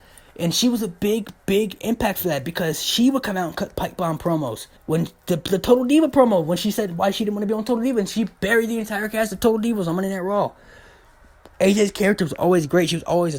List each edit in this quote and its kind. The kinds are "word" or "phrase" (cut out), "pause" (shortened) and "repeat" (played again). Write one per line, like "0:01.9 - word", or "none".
0:04.8 - pause
0:11.5 - pause